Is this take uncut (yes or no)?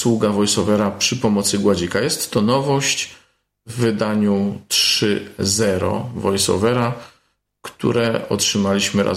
yes